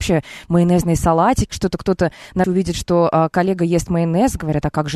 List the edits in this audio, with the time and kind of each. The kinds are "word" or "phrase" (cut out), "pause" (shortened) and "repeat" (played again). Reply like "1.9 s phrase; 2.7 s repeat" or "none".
1.5 s word; 2.4 s word